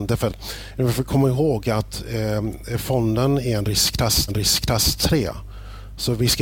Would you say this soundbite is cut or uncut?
cut